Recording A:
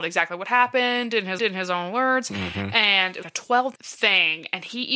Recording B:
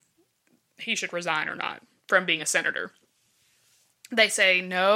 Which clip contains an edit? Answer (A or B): A